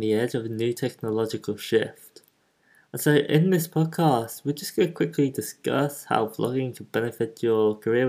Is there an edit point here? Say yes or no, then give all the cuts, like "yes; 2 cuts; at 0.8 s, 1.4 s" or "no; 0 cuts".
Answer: no; 0 cuts